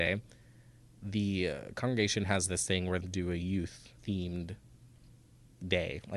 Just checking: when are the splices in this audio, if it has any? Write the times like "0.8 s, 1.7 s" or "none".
3.0 s, 4.0 s